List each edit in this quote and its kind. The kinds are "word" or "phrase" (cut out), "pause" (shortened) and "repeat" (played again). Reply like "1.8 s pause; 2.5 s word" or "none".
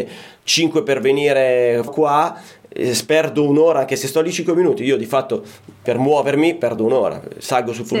1.9 s word